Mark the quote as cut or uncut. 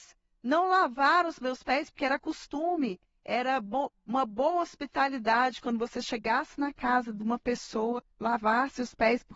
cut